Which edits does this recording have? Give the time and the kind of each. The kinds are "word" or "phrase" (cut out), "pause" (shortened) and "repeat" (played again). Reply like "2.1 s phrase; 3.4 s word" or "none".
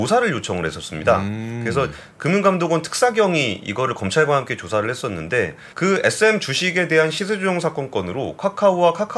5.7 s pause